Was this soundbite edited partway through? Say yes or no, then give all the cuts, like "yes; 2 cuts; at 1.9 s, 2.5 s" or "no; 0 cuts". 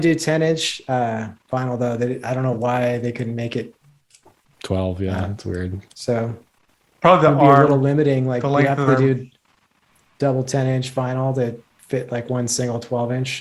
yes; 1 cut; at 8.9 s